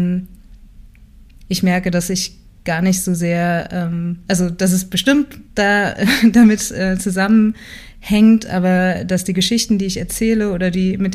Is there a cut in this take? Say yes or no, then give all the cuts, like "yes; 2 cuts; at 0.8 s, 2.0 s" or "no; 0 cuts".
yes; 1 cut; at 5.5 s